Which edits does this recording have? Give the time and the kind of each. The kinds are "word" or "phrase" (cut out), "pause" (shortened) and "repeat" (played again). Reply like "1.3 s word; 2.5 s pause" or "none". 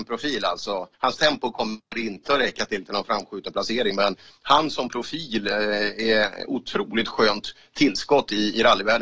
0.9 s pause